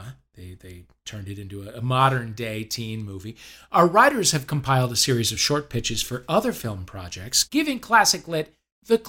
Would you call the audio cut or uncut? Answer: uncut